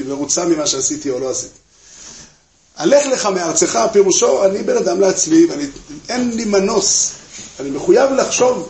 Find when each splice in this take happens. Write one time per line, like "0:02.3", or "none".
none